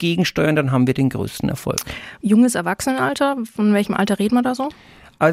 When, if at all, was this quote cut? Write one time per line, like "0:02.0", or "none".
none